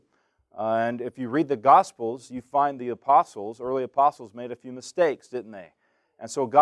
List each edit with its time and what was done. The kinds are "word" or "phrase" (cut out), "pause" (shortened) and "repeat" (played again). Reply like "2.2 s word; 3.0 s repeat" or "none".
none